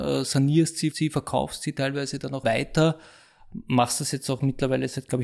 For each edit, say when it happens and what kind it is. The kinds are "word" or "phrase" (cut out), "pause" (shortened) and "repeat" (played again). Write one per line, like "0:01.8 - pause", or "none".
0:00.9 - word
0:02.4 - word